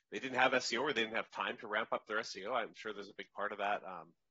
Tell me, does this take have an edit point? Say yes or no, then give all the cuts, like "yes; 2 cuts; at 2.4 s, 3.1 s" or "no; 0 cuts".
no; 0 cuts